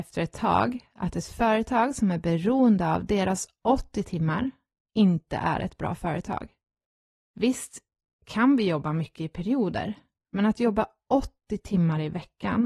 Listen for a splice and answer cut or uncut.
uncut